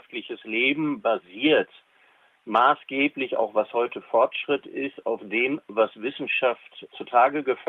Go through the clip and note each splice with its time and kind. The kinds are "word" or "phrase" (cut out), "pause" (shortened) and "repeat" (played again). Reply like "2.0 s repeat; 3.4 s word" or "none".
none